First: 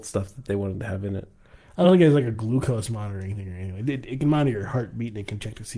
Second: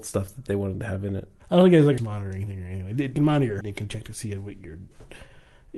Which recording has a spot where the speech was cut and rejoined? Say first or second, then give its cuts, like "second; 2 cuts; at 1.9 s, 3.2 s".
second; 4 cuts; at 1.4 s, 2.0 s, 3.1 s, 3.6 s